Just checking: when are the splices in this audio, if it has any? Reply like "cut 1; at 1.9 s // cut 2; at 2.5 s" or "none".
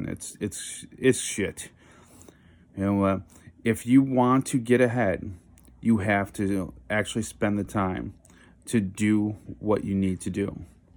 none